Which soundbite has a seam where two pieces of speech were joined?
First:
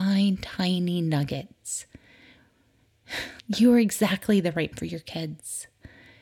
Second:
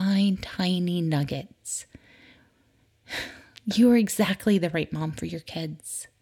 first; 2 cuts; at 3.4 s, 4.7 s

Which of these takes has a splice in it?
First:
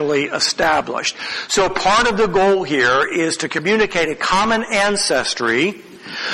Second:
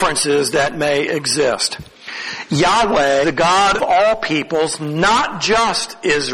second; 2 cuts; at 3.2 s, 3.8 s

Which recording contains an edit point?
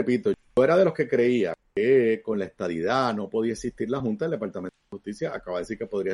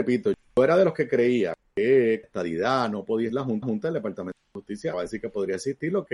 second; 4 cuts; at 2.2 s, 3.3 s, 3.6 s, 4.9 s

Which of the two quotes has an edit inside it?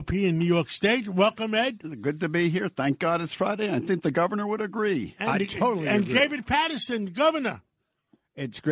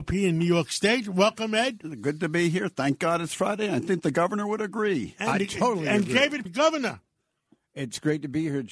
second; 1 cut; at 6.5 s

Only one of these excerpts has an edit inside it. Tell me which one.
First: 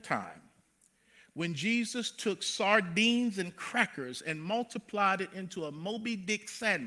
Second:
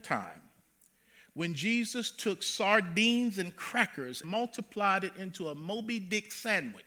second; 1 cut; at 4.2 s

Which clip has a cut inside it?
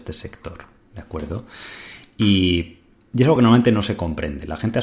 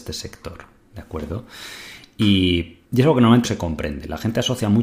second; 2 cuts; at 2.8 s, 3.4 s

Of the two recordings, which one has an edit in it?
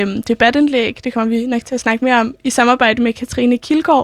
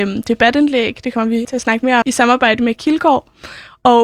second; 3 cuts; at 1.4 s, 2.0 s, 2.7 s

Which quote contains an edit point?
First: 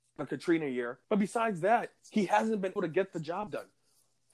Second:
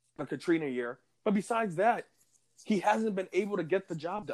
first; 3 cuts; at 1.0 s, 2.0 s, 2.8 s

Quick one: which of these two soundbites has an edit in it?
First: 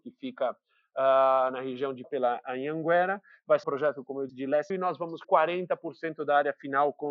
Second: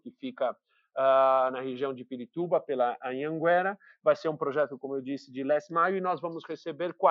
first; 5 cuts; at 2.0 s, 3.6 s, 4.3 s, 4.7 s, 5.2 s

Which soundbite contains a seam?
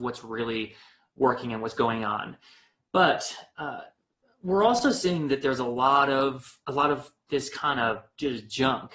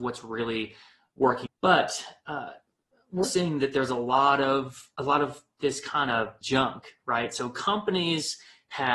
second; 3 cuts; at 1.5 s, 3.2 s, 6.4 s

